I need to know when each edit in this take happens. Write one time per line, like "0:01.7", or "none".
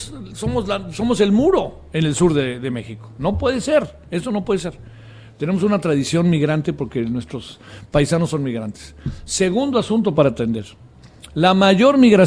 none